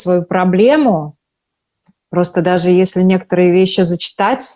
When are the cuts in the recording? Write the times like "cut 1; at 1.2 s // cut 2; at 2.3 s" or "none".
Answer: none